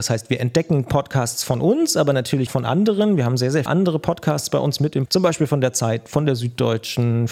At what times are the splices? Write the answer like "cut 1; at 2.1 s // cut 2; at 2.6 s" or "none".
cut 1; at 2.5 s // cut 2; at 3.7 s // cut 3; at 5.1 s